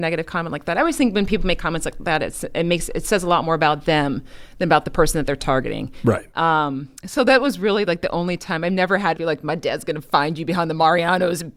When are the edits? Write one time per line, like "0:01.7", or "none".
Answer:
0:07.0
0:09.2